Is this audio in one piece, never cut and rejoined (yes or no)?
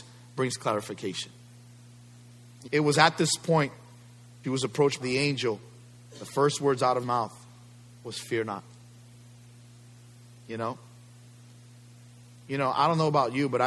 no